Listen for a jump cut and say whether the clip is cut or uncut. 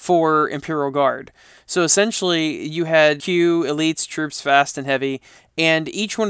cut